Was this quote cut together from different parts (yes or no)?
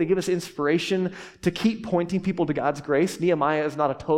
no